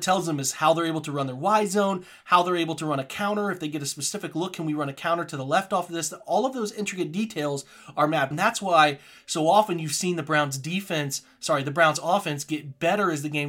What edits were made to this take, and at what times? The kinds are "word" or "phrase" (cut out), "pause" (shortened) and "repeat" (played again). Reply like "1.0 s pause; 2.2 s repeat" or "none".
8.3 s word